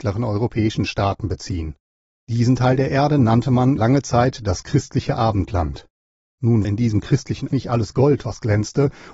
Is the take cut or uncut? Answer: cut